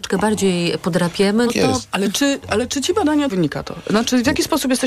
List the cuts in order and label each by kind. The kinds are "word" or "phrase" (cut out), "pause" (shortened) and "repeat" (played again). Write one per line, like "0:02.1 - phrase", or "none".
0:01.5 - word
0:03.3 - phrase